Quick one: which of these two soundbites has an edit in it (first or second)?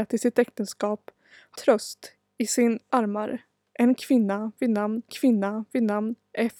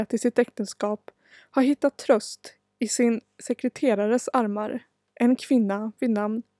first